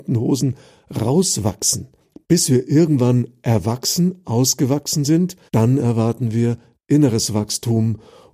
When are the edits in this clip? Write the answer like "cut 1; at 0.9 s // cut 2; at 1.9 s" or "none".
cut 1; at 2.0 s // cut 2; at 5.5 s